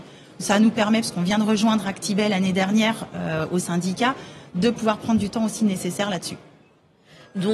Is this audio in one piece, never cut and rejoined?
yes; 0 cuts

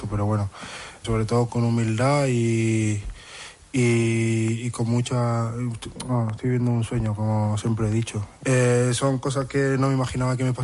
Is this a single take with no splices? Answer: no; 2 cuts; at 1.0 s, 1.5 s

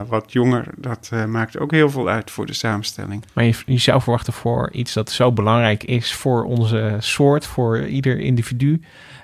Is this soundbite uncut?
no; 1 cut; at 3.3 s

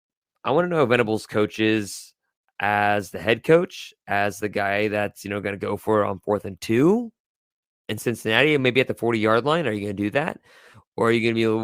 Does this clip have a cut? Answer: no; 0 cuts

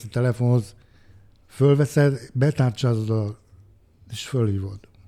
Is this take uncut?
yes; 0 cuts

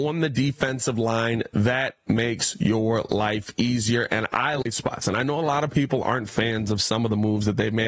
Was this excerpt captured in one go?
yes; 0 cuts

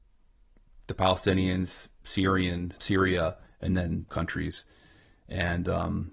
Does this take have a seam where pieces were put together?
yes; 3 cuts; at 2.8 s, 3.5 s, 4.1 s

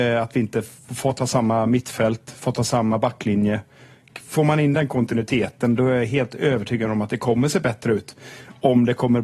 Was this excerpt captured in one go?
yes; 0 cuts

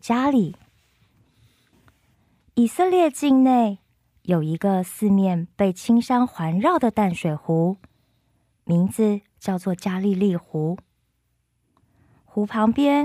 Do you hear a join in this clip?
no; 0 cuts

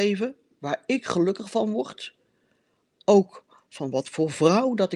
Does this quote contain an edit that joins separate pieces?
no; 0 cuts

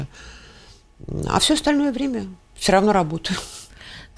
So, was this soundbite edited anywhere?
no; 0 cuts

